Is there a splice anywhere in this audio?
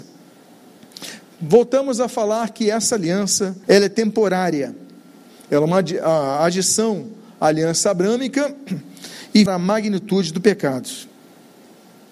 yes; 2 cuts; at 3.6 s, 9.5 s

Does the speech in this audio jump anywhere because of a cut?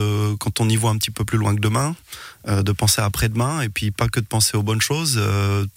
no; 0 cuts

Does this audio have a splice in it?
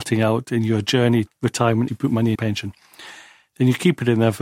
yes; 3 cuts; at 1.3 s, 1.9 s, 2.3 s

